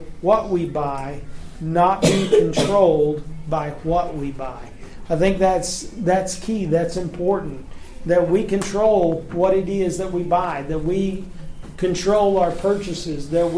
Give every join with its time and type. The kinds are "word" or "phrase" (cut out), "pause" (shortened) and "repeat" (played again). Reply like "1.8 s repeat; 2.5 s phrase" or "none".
none